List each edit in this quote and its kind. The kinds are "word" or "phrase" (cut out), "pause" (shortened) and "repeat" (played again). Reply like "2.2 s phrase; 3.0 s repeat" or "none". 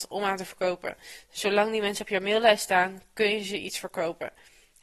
none